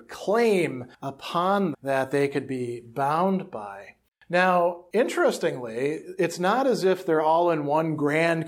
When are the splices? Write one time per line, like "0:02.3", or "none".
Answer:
0:01.7